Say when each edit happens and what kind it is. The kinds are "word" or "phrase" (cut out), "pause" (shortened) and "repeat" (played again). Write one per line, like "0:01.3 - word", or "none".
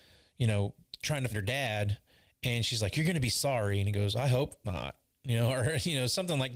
0:01.3 - word

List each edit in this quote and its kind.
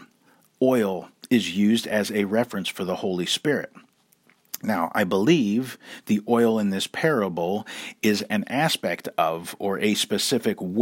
none

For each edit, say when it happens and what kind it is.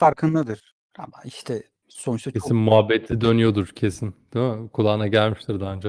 none

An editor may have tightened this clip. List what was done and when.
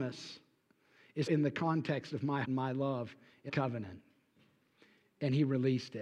0:01.3 - word
0:02.4 - word
0:03.5 - word

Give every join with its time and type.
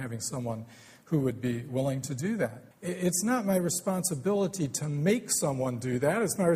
0:02.7 - pause

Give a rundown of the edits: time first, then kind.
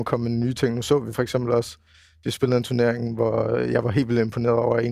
none

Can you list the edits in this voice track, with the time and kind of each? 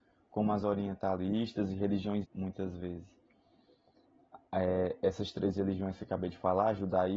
0:02.2 - word

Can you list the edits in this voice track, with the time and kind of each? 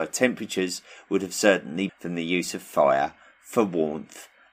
0:01.9 - word

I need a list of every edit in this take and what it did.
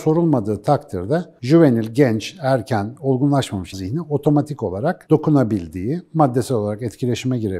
0:03.7 - word

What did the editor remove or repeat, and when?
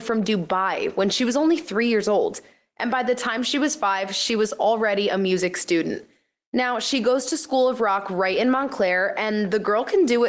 none

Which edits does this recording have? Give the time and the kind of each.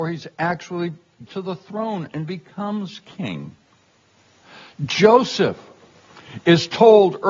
0:01.3 - word

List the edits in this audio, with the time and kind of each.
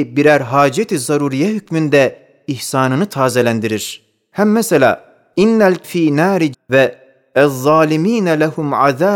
0:05.8 - word
0:06.5 - word

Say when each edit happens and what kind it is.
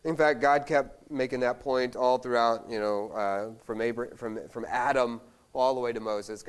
none

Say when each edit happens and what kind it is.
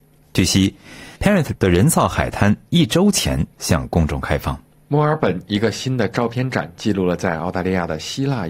0:01.2 - pause
0:01.6 - word
0:04.7 - pause

